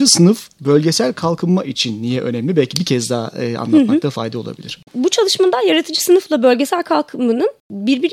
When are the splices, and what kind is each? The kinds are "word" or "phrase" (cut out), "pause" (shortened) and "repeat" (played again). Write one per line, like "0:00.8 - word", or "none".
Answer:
0:04.9 - pause